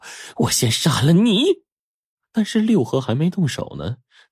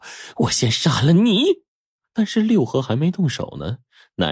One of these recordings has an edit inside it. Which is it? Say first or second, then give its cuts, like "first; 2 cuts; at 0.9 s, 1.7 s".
second; 1 cut; at 1.7 s